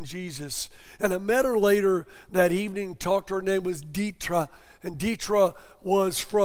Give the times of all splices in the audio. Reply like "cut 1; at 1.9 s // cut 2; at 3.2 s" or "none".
none